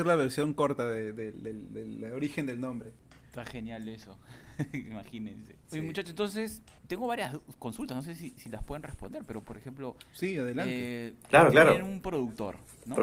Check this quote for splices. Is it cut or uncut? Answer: uncut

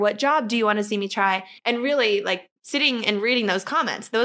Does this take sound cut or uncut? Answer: cut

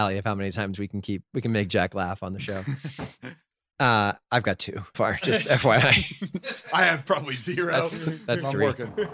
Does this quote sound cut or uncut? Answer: cut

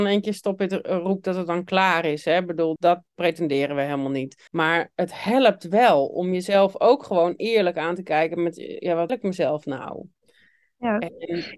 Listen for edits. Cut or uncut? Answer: cut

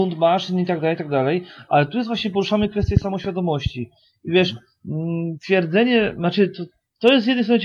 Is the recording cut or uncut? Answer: uncut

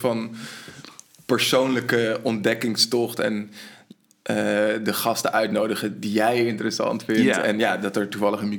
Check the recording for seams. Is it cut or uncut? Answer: uncut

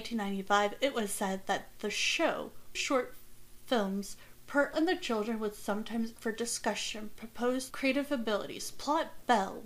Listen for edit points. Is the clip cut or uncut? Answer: cut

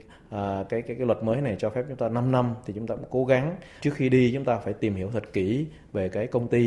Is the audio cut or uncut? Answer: cut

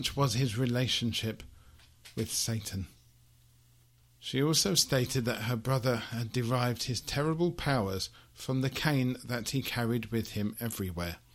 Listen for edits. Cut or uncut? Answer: uncut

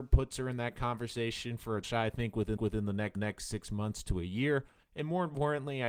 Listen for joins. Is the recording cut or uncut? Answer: cut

